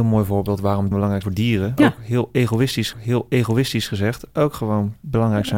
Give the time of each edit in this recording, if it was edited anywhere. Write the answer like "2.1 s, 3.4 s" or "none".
0.9 s, 1.2 s, 1.8 s, 2.9 s